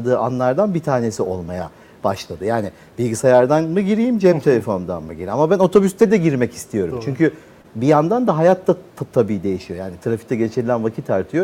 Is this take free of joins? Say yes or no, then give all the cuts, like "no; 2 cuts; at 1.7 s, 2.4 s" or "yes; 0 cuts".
yes; 0 cuts